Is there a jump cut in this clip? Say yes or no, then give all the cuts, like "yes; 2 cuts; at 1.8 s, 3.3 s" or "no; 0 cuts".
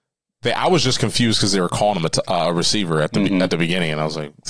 no; 0 cuts